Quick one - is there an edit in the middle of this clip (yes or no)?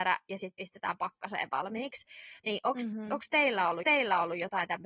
yes